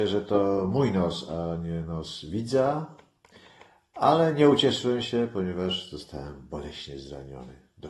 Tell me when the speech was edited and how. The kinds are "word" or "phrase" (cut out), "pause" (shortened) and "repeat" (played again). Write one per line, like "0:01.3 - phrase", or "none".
none